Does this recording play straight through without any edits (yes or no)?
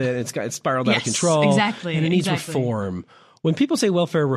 yes